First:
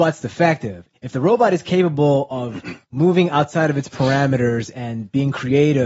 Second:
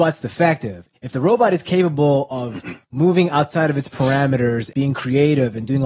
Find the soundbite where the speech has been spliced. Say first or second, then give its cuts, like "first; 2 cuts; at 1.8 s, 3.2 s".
second; 1 cut; at 4.7 s